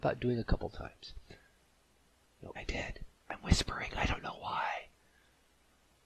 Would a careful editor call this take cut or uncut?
cut